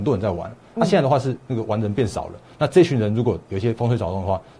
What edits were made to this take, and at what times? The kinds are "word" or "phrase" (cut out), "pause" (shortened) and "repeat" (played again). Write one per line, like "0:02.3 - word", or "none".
none